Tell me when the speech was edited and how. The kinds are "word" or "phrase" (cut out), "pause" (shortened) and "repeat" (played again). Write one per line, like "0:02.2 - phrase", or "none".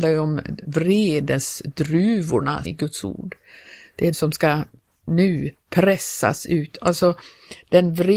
0:02.6 - phrase
0:04.1 - word

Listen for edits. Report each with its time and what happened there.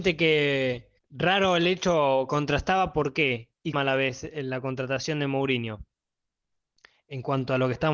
0:01.0 - pause
0:03.7 - word

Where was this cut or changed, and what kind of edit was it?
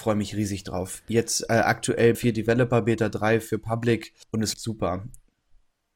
0:02.1 - word
0:04.2 - pause
0:04.5 - word

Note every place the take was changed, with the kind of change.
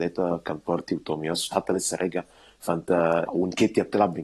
0:01.5 - word
0:03.3 - word

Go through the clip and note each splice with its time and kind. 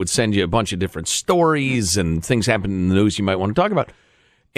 none

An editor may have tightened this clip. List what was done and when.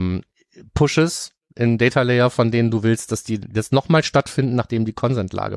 none

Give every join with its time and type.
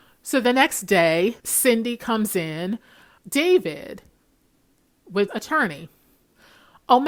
0:01.4 - pause
0:03.2 - word
0:05.3 - phrase

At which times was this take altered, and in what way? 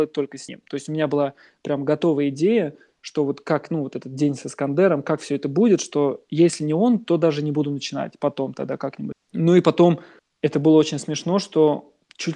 none

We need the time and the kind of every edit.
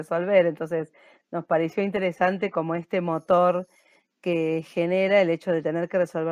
none

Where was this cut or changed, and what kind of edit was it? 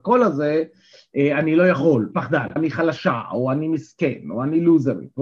0:02.1 - phrase
0:02.6 - word

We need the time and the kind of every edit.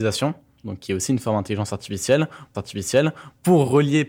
0:02.5 - repeat

